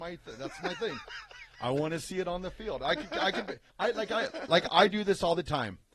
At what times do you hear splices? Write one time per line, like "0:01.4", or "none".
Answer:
0:03.7